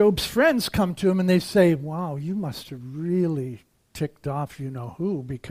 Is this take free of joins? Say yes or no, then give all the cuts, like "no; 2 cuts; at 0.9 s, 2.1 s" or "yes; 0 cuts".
yes; 0 cuts